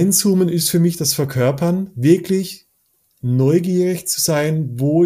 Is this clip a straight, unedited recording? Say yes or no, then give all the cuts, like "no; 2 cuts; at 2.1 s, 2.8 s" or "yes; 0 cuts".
yes; 0 cuts